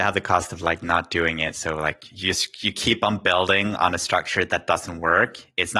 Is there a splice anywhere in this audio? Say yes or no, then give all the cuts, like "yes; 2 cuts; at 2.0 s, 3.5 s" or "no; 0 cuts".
no; 0 cuts